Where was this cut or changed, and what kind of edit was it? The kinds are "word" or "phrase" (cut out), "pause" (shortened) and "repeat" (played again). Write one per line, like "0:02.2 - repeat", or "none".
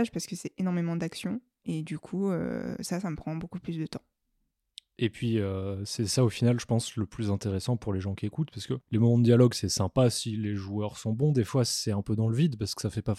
none